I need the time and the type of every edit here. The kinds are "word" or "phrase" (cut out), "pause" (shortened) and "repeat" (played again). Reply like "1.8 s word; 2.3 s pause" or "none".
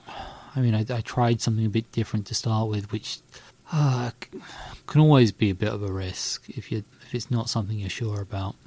3.5 s pause; 4.8 s pause; 6.9 s pause